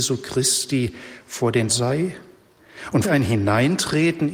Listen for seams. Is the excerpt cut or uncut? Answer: cut